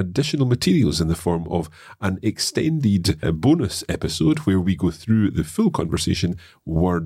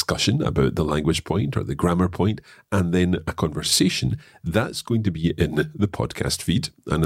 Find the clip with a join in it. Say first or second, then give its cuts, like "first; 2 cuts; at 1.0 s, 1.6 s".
first; 1 cut; at 3.2 s